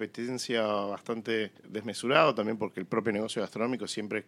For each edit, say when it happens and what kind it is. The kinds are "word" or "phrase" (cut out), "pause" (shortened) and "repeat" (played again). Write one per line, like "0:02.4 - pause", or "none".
0:01.6 - pause